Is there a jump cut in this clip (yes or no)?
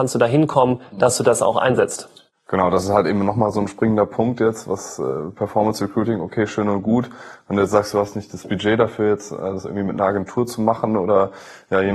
no